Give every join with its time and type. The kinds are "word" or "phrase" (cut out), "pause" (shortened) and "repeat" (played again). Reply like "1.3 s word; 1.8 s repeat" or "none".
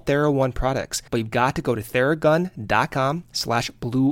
1.1 s pause